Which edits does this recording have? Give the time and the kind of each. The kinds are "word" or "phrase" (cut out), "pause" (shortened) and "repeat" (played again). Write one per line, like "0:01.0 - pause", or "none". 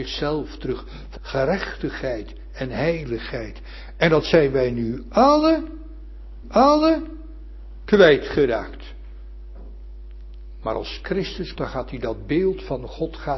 0:01.2 - phrase
0:06.4 - repeat
0:11.6 - word